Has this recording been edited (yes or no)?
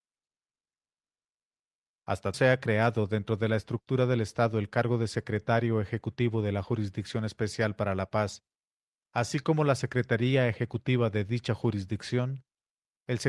yes